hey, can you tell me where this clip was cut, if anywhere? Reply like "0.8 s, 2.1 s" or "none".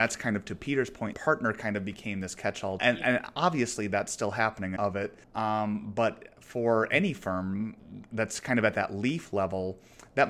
1.1 s, 2.8 s, 4.8 s, 5.2 s